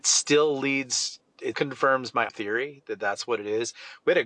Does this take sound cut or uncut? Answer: cut